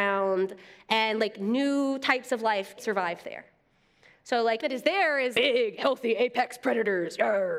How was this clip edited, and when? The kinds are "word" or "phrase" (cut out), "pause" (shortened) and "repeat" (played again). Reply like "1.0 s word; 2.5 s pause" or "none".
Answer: 2.8 s word; 4.6 s word; 5.3 s word